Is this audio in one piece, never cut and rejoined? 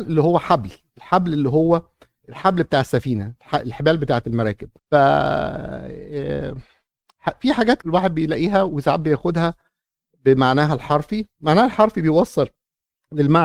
no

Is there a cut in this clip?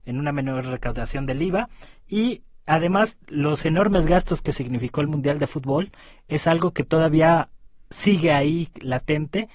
no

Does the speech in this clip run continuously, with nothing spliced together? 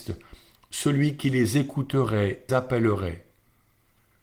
no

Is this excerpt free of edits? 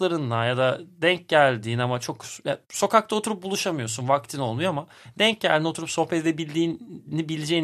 no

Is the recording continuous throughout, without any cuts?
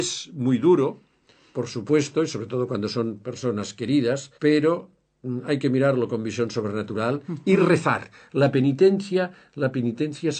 no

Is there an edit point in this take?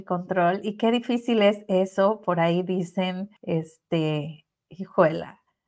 yes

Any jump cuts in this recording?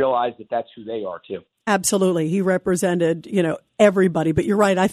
no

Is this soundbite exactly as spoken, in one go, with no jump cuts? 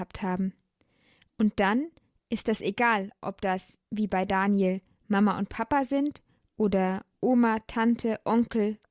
yes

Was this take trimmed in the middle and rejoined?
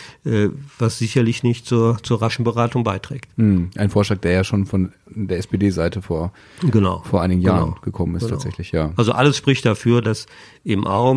no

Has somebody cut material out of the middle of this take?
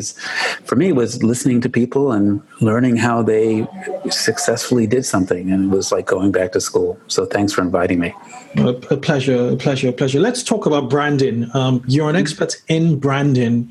yes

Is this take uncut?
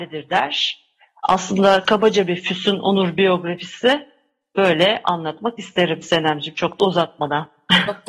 yes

